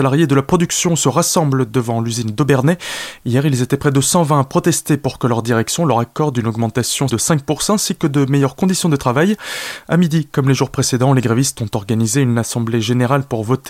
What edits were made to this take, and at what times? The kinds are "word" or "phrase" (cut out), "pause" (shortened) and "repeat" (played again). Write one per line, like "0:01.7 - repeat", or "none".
0:07.1 - word